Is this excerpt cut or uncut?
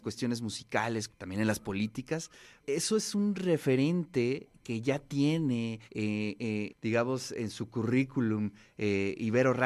cut